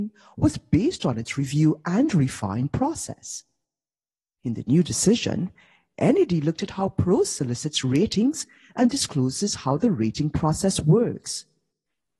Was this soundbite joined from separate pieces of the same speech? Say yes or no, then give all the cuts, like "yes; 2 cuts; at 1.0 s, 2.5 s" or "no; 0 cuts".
no; 0 cuts